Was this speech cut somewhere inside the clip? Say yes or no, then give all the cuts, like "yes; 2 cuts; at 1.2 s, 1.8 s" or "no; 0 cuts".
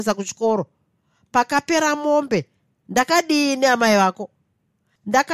no; 0 cuts